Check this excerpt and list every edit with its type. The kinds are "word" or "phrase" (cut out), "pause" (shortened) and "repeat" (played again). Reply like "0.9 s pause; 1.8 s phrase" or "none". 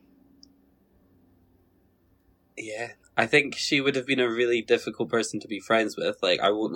3.0 s pause